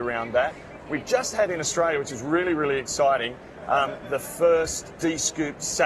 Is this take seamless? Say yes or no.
no